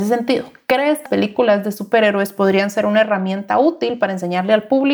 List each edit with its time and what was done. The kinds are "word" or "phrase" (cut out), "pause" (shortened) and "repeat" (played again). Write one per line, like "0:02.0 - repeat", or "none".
0:01.1 - word